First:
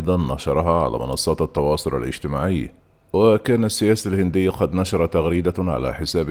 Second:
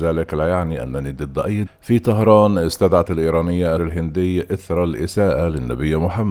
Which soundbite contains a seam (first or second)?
second